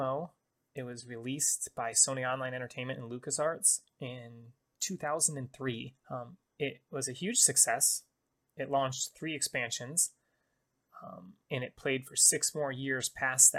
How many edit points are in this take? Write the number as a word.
two